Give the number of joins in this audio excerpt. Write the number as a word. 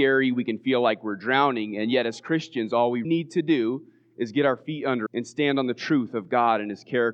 two